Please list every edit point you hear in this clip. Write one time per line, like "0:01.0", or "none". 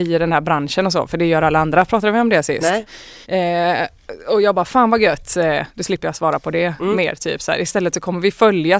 0:03.2
0:05.7